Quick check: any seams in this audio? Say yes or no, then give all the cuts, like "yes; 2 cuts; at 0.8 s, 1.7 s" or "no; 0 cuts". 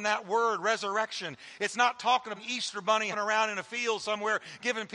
yes; 2 cuts; at 2.4 s, 3.1 s